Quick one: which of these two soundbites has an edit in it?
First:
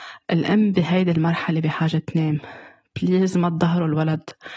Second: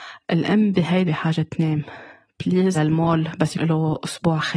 second; 3 cuts; at 1.1 s, 2.7 s, 3.6 s

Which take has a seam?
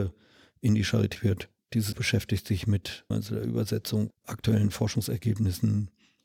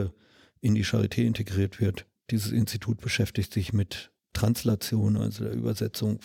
first; 4 cuts; at 1.1 s, 1.9 s, 3.1 s, 4.1 s

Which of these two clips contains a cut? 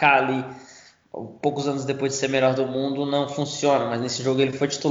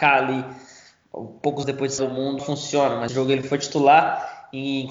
second; 4 cuts; at 1.6 s, 2.0 s, 2.4 s, 3.1 s

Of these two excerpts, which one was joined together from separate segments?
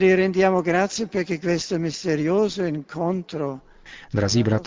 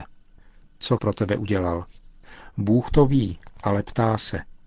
second; 1 cut; at 1.0 s

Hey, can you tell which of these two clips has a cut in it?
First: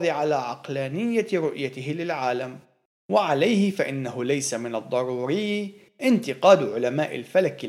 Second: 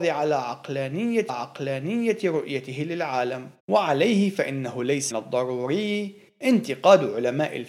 second; 3 cuts; at 1.3 s, 3.6 s, 5.1 s

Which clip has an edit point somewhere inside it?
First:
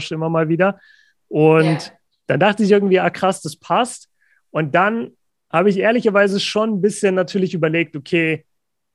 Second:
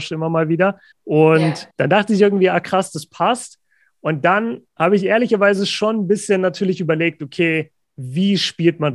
second; 4 cuts; at 0.9 s, 1.7 s, 4.7 s, 7.8 s

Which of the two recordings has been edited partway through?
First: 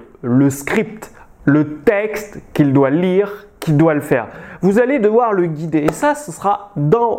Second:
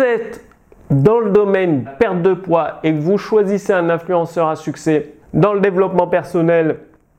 second; 2 cuts; at 1.9 s, 5.2 s

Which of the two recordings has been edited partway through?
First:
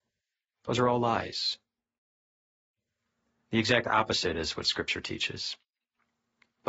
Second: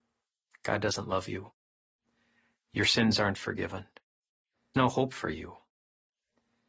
second; 1 cut; at 4.7 s

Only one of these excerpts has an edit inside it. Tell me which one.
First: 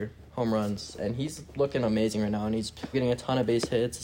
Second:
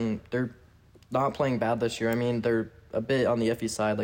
first; 1 cut; at 2.9 s

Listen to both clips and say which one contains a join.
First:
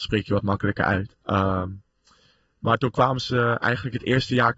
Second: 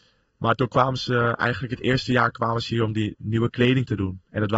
first; 1 cut; at 1.2 s

